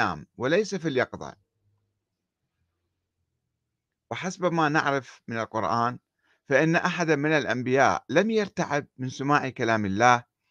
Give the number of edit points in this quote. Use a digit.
0